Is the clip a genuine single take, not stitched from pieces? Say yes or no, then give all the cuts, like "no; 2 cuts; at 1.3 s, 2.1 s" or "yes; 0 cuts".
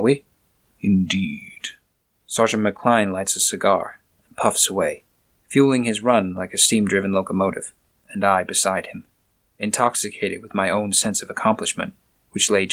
yes; 0 cuts